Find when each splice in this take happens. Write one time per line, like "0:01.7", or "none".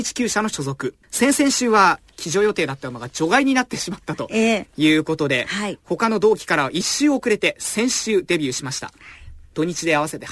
0:01.0